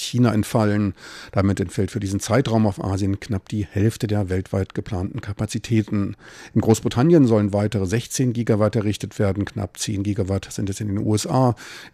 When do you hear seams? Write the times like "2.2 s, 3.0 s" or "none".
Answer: none